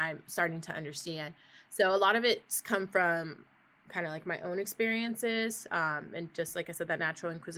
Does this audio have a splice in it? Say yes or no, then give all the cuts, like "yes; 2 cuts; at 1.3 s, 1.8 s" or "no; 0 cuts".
no; 0 cuts